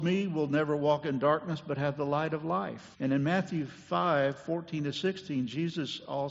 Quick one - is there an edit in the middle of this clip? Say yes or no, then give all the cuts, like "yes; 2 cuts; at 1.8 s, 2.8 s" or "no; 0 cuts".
yes; 1 cut; at 2.9 s